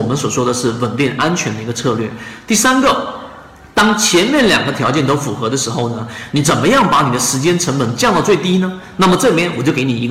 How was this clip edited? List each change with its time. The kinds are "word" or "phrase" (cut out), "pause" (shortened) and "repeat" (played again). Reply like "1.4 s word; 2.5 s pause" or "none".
none